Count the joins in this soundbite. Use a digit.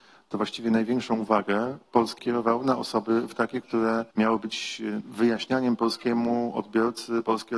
4